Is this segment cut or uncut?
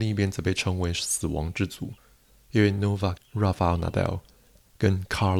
cut